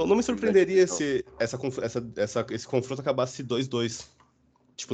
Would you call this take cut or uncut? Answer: uncut